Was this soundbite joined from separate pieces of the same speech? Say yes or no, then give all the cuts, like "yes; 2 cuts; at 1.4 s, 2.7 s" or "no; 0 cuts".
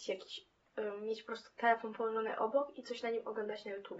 no; 0 cuts